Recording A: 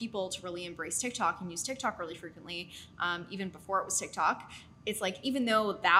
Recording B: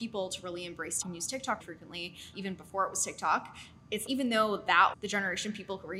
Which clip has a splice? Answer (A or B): B